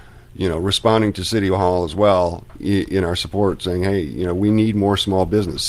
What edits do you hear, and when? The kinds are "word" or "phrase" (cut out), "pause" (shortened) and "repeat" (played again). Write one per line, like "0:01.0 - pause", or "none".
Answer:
none